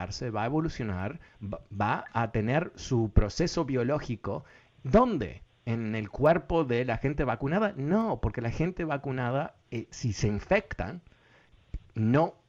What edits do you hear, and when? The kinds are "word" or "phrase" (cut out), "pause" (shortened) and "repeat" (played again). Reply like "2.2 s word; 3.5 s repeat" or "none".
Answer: none